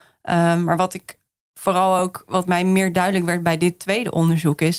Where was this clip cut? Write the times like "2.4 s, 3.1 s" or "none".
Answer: none